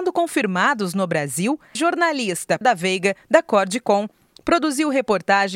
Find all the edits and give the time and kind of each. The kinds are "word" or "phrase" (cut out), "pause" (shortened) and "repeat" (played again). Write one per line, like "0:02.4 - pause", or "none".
0:01.7 - word
0:02.6 - word